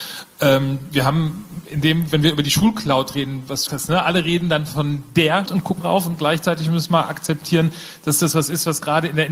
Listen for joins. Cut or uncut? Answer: cut